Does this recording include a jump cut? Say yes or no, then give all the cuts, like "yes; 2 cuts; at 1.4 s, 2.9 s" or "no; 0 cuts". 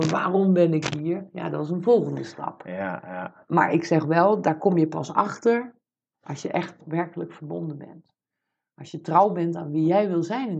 no; 0 cuts